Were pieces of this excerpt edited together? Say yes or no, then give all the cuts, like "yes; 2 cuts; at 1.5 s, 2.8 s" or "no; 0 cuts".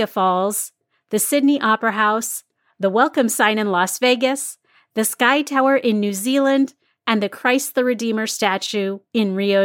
no; 0 cuts